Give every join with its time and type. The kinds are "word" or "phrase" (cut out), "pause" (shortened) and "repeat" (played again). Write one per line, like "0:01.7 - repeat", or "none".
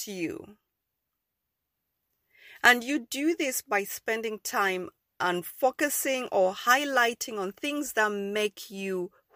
none